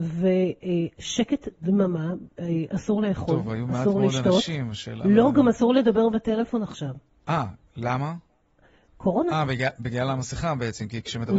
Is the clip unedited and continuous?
yes; 0 cuts

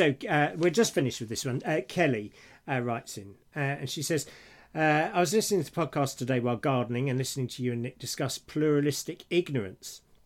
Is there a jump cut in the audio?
no; 0 cuts

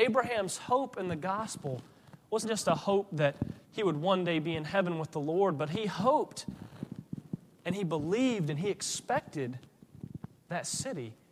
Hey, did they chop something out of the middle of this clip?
yes; 2 cuts; at 2.4 s, 3.6 s

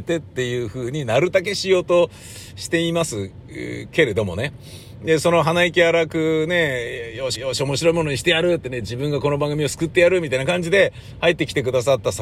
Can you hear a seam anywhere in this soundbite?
yes; 1 cut; at 7.3 s

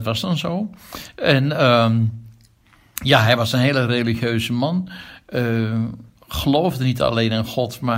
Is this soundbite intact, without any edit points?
yes; 0 cuts

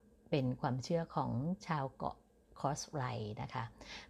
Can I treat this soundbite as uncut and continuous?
yes; 0 cuts

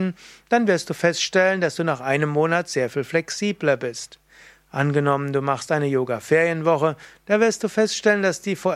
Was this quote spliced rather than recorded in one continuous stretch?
no; 0 cuts

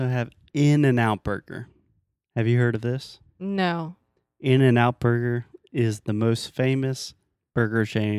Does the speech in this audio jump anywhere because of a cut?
no; 0 cuts

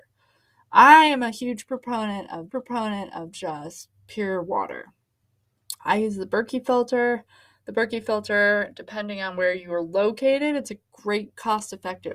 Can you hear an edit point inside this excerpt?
yes; 1 cut; at 2.5 s

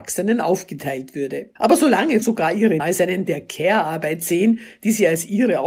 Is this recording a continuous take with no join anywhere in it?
no; 4 cuts; at 1.6 s, 2.2 s, 2.8 s, 3.3 s

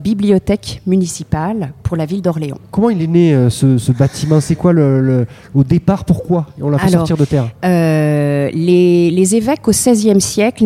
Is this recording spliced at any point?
no; 0 cuts

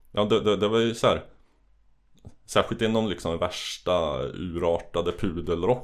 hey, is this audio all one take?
yes; 0 cuts

